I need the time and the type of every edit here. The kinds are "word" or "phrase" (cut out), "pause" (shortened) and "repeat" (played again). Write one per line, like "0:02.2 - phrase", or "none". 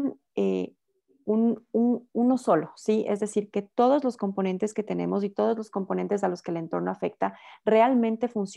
none